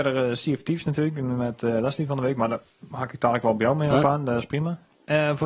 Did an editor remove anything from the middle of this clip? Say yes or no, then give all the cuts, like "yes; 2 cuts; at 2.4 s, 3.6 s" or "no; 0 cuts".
no; 0 cuts